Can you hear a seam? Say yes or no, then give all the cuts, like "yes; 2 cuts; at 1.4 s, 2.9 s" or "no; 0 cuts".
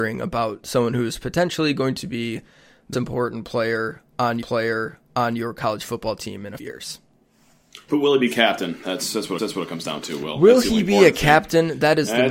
yes; 4 cuts; at 2.9 s, 4.4 s, 6.6 s, 9.4 s